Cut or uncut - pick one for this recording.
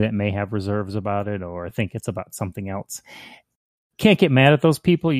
uncut